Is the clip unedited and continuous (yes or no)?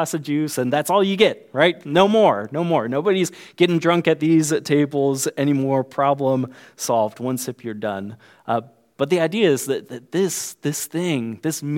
yes